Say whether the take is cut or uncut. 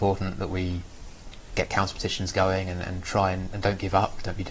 uncut